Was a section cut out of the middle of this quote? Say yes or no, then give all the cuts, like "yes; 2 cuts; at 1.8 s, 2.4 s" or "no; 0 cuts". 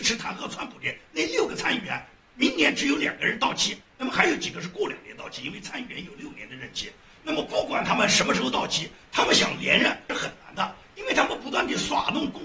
no; 0 cuts